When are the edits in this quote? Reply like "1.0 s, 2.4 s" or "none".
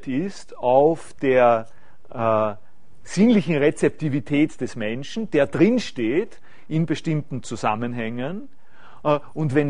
none